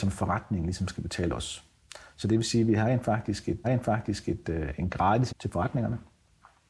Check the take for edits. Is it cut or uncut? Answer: cut